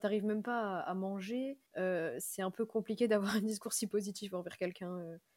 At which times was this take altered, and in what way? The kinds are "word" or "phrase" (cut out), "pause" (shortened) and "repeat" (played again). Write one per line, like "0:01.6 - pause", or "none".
0:01.7 - pause